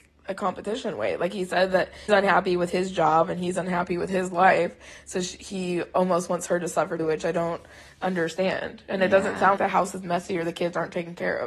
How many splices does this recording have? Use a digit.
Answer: 3